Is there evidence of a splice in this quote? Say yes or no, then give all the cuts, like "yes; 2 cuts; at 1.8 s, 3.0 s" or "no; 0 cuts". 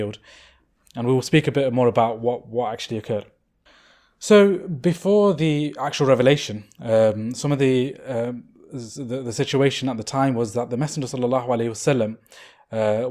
no; 0 cuts